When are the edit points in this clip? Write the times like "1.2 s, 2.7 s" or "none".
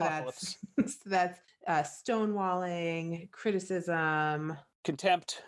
none